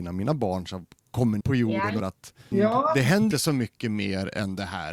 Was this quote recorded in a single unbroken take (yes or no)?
no